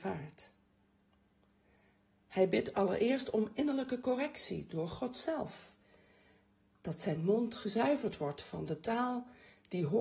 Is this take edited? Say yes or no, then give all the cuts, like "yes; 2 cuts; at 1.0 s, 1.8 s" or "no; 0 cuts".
no; 0 cuts